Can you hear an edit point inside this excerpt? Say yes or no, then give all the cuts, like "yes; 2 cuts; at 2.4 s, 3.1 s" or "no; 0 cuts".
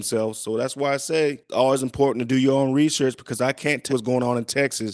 yes; 1 cut; at 3.9 s